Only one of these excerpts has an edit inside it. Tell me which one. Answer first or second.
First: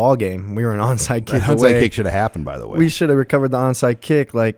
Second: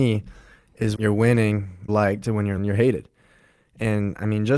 second